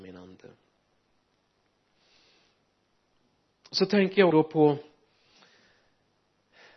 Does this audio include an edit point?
yes; 1 cut; at 4.3 s

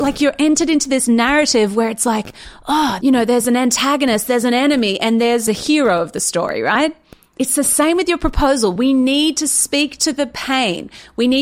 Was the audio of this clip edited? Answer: no; 0 cuts

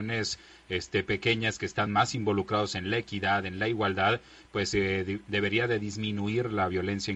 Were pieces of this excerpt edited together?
no; 0 cuts

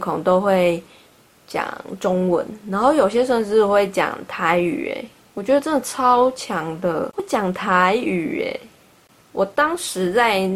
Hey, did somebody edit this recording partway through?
no; 0 cuts

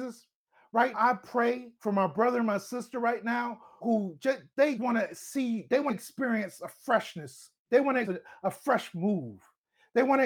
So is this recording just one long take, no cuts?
no; 7 cuts; at 0.9 s, 1.8 s, 3.8 s, 4.8 s, 5.9 s, 7.6 s, 8.0 s

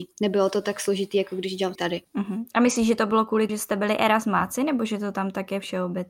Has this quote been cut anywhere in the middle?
yes; 2 cuts; at 1.8 s, 3.5 s

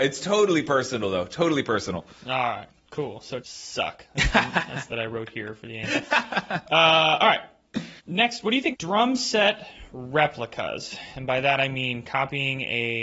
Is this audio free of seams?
no; 4 cuts; at 3.4 s, 4.9 s, 8.0 s, 8.7 s

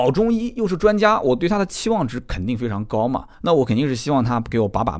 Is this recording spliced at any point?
yes; 1 cut; at 3.3 s

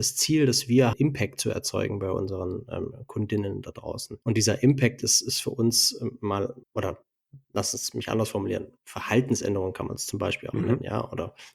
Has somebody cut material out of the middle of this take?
yes; 3 cuts; at 0.9 s, 4.2 s, 6.6 s

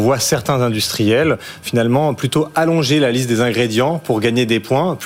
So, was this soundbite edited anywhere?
no; 0 cuts

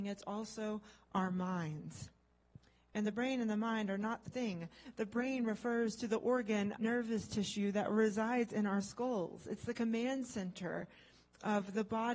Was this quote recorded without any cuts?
no; 2 cuts; at 4.3 s, 6.8 s

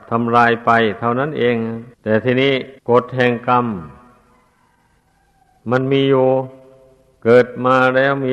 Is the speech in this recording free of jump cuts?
no; 2 cuts; at 1.9 s, 2.8 s

